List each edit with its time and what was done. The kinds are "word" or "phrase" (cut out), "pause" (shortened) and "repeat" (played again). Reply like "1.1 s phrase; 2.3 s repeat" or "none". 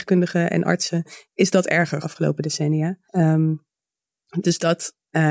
1.2 s pause; 2.0 s phrase; 3.0 s pause